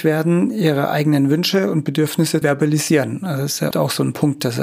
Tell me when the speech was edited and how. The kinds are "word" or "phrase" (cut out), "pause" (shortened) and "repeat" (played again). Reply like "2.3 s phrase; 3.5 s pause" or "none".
2.4 s word; 3.7 s word